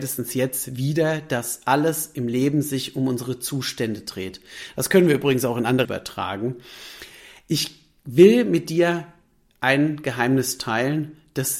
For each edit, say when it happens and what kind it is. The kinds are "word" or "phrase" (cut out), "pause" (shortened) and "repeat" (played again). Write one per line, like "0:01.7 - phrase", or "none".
0:05.8 - word